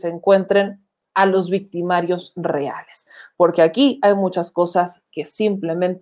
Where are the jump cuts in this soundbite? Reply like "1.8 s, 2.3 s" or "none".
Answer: none